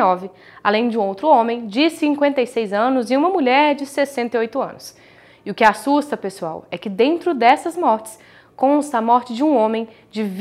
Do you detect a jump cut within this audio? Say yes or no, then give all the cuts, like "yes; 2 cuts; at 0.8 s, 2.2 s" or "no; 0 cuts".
no; 0 cuts